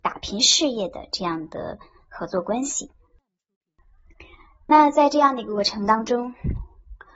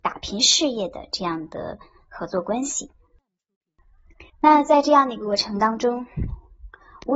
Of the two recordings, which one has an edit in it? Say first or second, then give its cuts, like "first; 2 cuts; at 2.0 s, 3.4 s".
second; 1 cut; at 4.3 s